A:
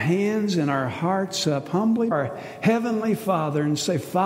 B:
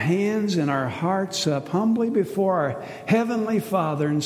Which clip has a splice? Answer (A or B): A